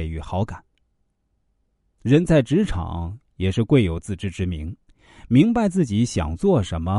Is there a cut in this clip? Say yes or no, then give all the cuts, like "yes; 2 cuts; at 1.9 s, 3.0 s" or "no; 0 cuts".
no; 0 cuts